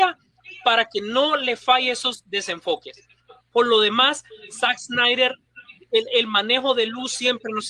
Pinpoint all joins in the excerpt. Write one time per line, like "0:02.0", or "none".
none